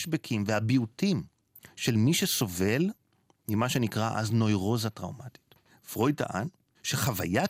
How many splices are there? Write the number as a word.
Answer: zero